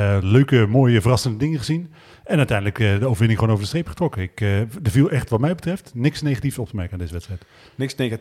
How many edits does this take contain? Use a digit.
0